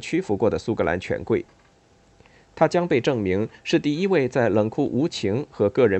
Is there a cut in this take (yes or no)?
no